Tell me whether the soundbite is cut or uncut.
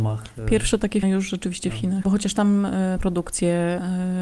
cut